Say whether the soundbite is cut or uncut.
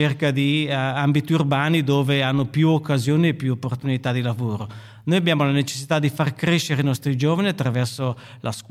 uncut